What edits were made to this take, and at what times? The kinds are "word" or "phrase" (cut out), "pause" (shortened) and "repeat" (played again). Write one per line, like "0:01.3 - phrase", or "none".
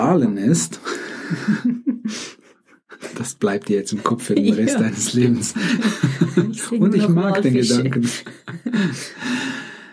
none